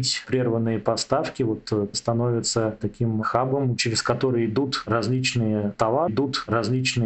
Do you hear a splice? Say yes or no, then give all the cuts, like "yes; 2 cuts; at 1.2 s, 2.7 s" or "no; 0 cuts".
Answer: yes; 2 cuts; at 1.9 s, 6.1 s